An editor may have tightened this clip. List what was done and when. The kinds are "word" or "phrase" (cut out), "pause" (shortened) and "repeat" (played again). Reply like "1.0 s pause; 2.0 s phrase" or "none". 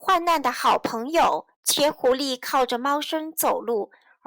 1.5 s pause